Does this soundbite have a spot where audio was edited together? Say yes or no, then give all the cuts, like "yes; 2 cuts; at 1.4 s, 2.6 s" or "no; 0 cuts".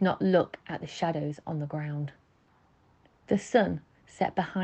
no; 0 cuts